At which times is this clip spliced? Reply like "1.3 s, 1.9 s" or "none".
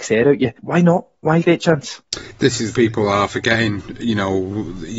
1.4 s, 2.7 s